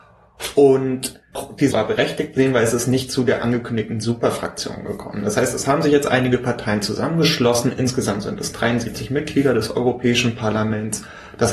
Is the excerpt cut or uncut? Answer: cut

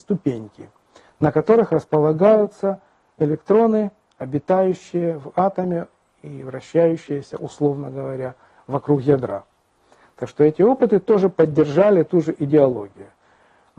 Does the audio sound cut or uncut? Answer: uncut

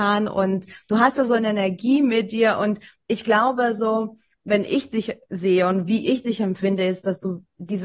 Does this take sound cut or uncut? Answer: uncut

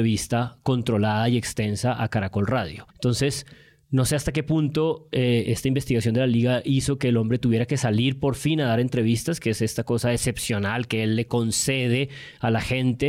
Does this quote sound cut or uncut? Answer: uncut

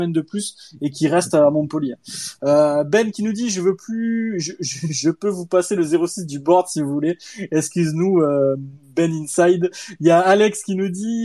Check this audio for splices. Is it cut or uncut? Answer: uncut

